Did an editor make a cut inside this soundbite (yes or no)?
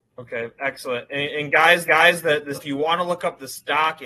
yes